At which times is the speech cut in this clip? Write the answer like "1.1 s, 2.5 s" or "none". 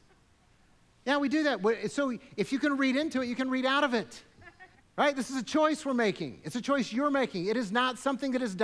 4.7 s